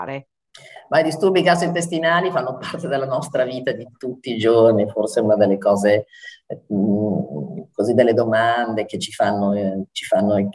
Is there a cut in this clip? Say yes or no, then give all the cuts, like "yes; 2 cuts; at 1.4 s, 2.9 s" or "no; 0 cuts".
no; 0 cuts